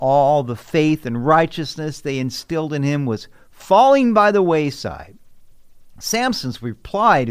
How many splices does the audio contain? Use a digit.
0